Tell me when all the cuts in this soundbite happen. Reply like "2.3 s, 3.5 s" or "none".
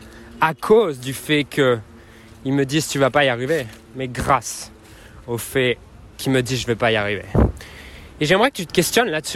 6.1 s